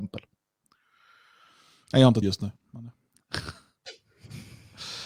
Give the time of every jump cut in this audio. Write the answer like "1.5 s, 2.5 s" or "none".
2.2 s